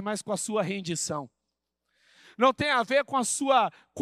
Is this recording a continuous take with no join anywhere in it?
yes; 0 cuts

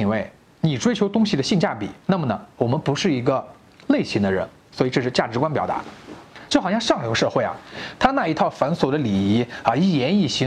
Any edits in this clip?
yes; 1 cut; at 2.0 s

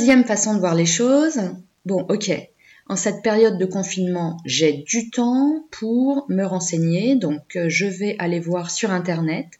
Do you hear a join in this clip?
no; 0 cuts

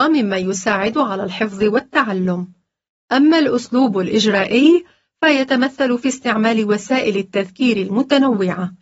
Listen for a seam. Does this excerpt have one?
no; 0 cuts

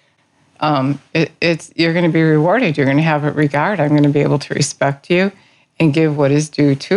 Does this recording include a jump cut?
no; 0 cuts

